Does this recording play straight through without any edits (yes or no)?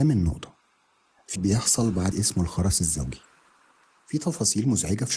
no